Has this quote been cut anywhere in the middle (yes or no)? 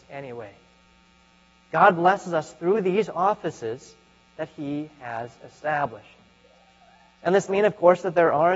yes